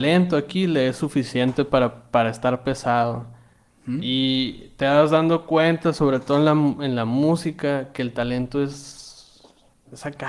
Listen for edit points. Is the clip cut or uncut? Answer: uncut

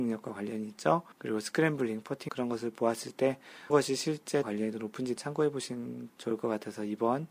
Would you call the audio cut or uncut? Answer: cut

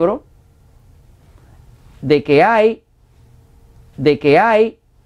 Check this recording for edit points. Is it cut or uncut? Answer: cut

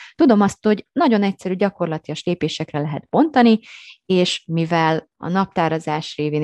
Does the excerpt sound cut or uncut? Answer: uncut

